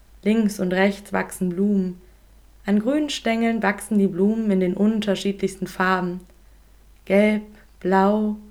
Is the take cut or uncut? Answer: uncut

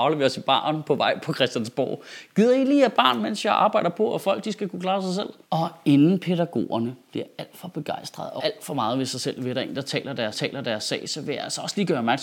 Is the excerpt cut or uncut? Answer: cut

